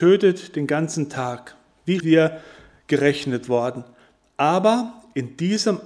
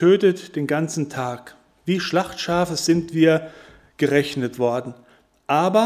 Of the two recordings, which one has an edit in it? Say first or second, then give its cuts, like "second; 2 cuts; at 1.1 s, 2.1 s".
first; 1 cut; at 2.0 s